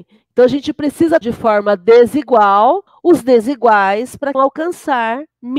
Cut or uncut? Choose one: cut